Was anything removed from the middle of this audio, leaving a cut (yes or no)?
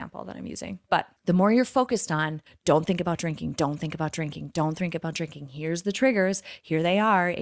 yes